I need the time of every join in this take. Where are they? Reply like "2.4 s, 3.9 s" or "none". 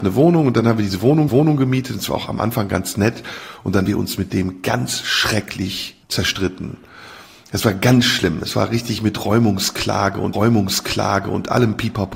1.3 s, 3.9 s, 6.0 s, 10.3 s